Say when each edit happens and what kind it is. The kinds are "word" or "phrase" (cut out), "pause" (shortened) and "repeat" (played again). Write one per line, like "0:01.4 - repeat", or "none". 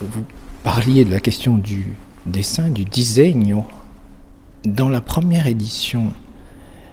none